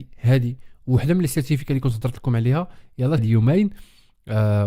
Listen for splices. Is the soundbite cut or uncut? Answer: cut